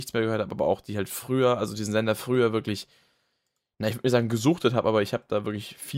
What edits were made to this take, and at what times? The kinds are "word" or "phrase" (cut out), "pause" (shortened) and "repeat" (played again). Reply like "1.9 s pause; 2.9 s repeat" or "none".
none